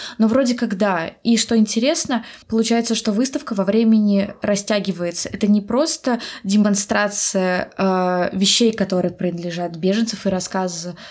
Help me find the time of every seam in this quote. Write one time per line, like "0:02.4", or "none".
0:02.4